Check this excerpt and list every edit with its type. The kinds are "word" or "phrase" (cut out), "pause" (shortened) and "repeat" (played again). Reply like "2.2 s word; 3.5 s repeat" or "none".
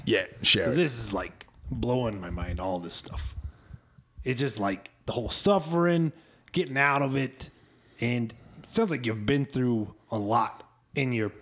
none